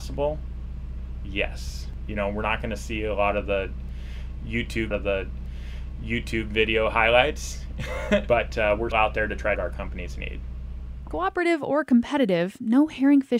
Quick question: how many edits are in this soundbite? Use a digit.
4